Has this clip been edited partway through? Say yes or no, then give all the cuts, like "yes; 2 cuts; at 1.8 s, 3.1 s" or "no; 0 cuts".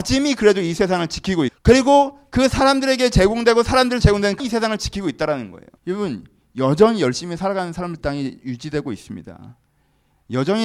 yes; 5 cuts; at 1.5 s, 4.0 s, 4.4 s, 5.8 s, 8.0 s